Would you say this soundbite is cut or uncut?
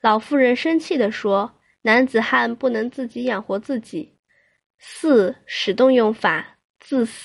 uncut